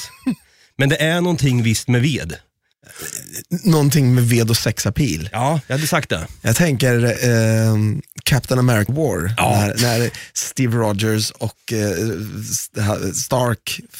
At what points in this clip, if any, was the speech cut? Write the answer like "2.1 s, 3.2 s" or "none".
8.9 s